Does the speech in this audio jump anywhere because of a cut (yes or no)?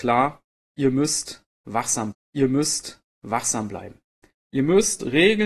yes